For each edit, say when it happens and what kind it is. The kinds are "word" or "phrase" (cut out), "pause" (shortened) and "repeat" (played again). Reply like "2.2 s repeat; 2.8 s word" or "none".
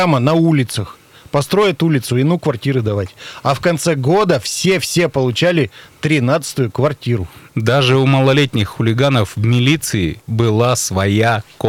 none